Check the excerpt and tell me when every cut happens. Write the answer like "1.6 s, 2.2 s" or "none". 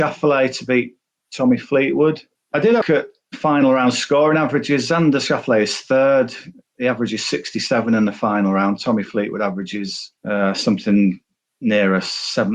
2.8 s